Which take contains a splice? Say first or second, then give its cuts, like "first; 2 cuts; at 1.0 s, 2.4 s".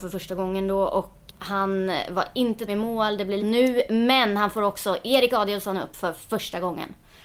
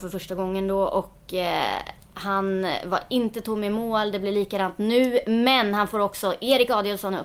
first; 3 cuts; at 1.3 s, 2.7 s, 3.4 s